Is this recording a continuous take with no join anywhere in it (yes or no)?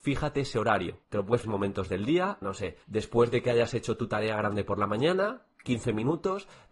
no